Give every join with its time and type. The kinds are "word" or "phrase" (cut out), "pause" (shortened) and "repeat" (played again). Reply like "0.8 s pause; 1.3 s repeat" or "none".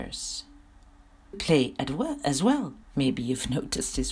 1.3 s word; 2.8 s pause